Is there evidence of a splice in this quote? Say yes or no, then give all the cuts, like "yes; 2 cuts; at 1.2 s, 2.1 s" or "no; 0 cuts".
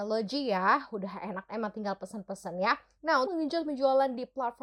yes; 2 cuts; at 1.5 s, 3.3 s